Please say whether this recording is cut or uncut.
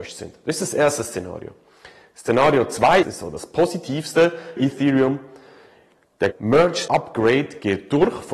cut